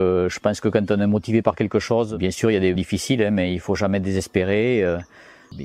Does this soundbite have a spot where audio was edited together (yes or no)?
yes